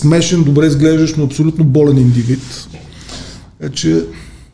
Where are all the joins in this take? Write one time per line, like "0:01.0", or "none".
none